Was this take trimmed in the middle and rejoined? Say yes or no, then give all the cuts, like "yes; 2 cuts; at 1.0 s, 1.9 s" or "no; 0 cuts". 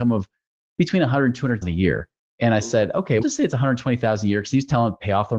yes; 2 cuts; at 1.6 s, 3.2 s